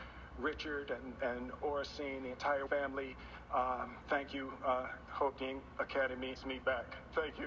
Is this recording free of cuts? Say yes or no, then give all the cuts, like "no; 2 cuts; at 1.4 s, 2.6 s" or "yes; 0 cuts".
no; 4 cuts; at 2.7 s, 4.0 s, 5.0 s, 6.4 s